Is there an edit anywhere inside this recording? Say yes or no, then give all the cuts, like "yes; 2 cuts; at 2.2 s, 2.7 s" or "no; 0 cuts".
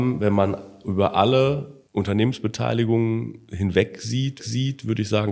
yes; 2 cuts; at 1.9 s, 4.4 s